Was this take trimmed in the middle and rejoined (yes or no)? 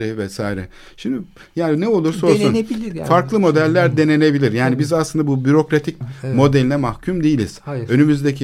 yes